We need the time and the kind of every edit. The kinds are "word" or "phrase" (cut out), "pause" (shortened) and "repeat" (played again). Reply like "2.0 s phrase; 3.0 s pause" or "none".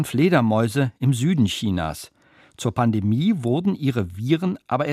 none